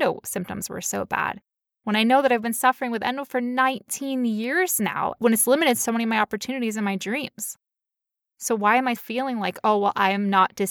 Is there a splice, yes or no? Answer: yes